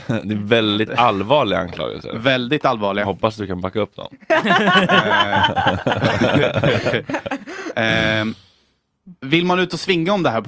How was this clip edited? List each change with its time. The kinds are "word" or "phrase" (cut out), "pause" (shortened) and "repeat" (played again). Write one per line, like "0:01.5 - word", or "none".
0:09.2 - pause